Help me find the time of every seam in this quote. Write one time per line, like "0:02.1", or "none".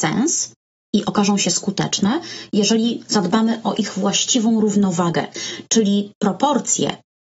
none